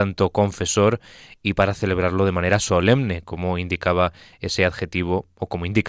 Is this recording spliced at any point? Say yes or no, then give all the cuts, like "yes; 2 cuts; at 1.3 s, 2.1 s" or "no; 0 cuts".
no; 0 cuts